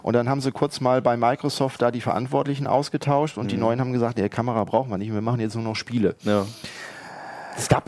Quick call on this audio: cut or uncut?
uncut